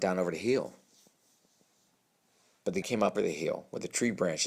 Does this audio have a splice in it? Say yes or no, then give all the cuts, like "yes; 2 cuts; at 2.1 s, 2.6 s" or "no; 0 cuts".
yes; 2 cuts; at 2.8 s, 3.1 s